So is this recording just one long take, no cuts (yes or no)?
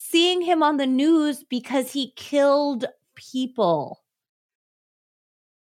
no